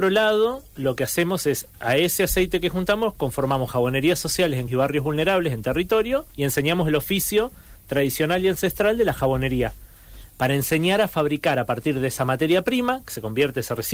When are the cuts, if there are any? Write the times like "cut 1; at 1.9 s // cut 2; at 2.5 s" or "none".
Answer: cut 1; at 4.7 s // cut 2; at 6.3 s